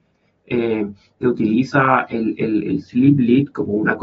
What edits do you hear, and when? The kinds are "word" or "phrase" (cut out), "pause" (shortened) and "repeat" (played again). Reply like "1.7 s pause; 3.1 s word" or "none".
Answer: none